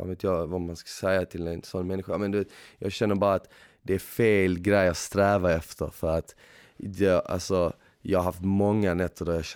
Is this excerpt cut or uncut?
uncut